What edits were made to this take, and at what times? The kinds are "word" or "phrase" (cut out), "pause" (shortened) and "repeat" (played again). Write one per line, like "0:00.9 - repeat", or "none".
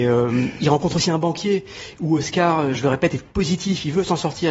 none

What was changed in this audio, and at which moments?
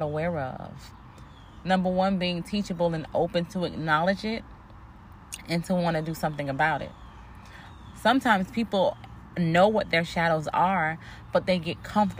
none

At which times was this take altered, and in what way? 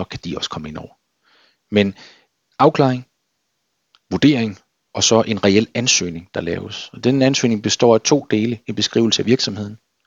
none

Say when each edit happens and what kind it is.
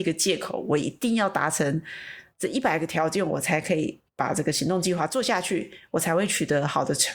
0:04.1 - pause

